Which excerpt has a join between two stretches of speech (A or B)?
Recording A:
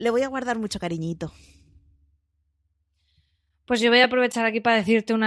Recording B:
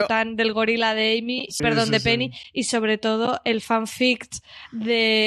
B